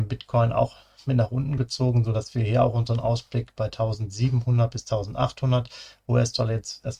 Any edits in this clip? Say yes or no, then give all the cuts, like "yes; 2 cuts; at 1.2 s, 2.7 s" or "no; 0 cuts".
no; 0 cuts